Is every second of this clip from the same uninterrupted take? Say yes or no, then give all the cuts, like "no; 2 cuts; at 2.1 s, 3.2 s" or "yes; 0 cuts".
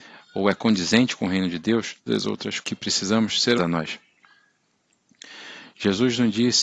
no; 3 cuts; at 2.1 s, 2.6 s, 3.6 s